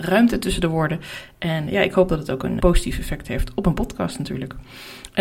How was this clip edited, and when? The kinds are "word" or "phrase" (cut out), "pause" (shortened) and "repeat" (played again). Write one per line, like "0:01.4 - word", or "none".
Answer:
0:01.7 - word
0:02.6 - word

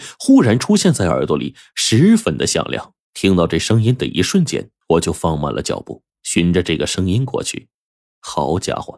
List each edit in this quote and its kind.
0:03.0 - pause
0:04.8 - pause
0:06.1 - pause

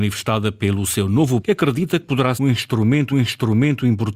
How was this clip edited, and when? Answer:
0:01.4 - word
0:02.4 - word
0:03.1 - repeat

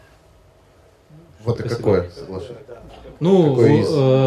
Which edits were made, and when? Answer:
0:01.6 - word

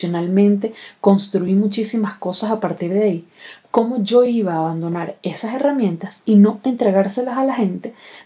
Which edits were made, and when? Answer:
none

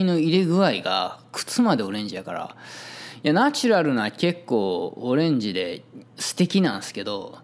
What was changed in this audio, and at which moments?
0:06.1 - pause

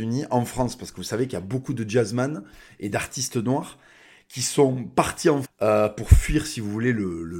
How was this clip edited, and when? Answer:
0:05.4 - phrase

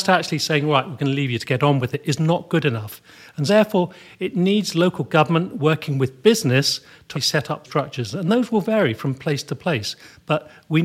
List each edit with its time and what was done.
0:03.5 - word
0:07.1 - word
0:07.6 - word

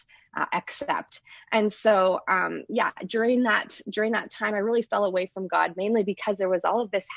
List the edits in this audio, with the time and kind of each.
none

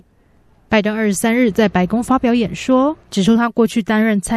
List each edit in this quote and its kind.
0:03.0 - pause

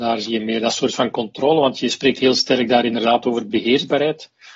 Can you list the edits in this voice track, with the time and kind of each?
none

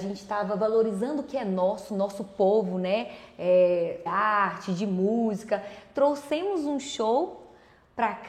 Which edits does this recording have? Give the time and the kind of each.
0:04.1 - phrase

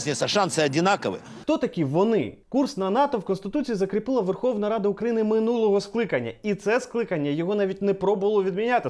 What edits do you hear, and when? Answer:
0:02.4 - pause

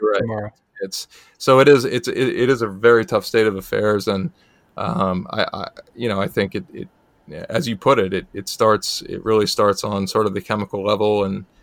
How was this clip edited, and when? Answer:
none

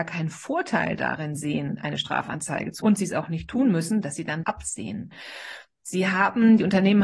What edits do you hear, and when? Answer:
0:02.8 - word
0:04.4 - word

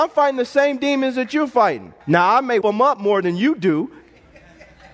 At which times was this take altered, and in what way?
0:02.0 - pause
0:02.6 - word

